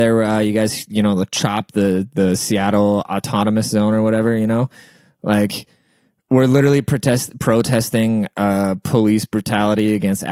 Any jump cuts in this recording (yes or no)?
no